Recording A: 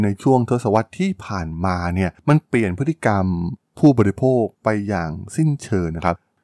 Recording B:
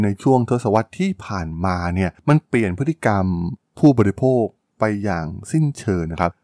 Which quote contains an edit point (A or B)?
A